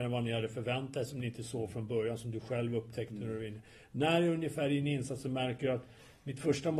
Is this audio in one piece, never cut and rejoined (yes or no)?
yes